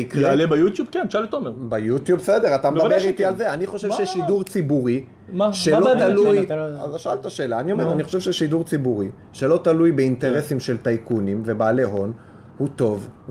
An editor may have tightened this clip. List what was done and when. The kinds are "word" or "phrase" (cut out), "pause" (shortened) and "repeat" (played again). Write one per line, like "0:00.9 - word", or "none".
none

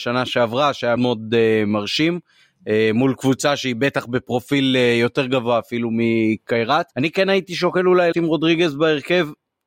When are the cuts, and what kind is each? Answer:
0:01.0 - word
0:06.9 - pause
0:08.1 - word

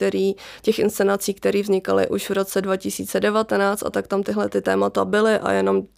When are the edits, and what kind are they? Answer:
0:03.9 - word

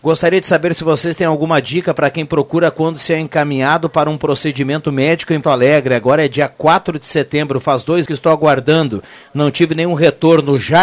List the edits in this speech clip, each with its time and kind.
0:05.4 - word
0:08.1 - word

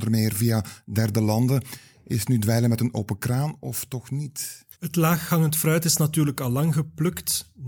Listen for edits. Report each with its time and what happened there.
0:04.7 - pause

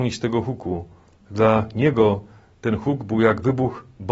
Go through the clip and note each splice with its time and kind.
none

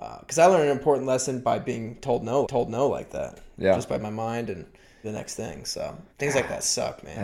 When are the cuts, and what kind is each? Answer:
0:02.4 - repeat
0:04.0 - phrase
0:05.0 - phrase
0:06.1 - pause

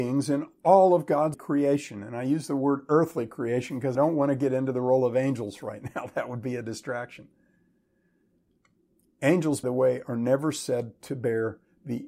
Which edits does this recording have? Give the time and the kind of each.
0:01.3 - word
0:03.9 - word
0:09.6 - word

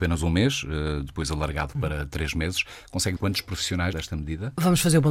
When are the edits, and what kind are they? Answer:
0:01.1 - word
0:03.2 - word
0:03.9 - word

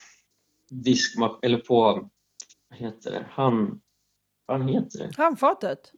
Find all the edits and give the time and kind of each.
0:02.5 - pause

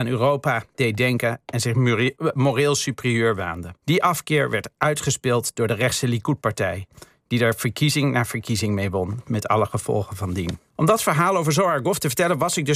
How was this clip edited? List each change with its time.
0:03.8 - pause
0:10.7 - pause

